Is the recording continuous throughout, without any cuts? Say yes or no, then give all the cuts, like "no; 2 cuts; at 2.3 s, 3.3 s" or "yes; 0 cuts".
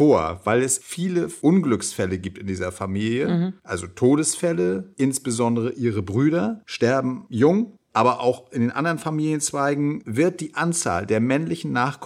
yes; 0 cuts